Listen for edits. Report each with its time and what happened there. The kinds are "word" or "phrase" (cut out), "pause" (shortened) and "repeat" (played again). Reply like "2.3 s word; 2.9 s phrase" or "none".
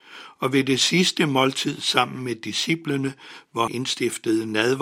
3.7 s word